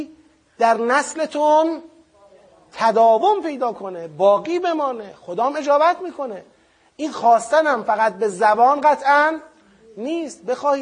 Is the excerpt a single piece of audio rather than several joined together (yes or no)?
yes